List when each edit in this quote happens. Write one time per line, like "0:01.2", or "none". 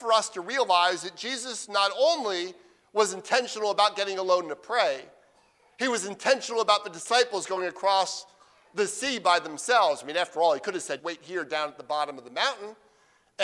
0:11.0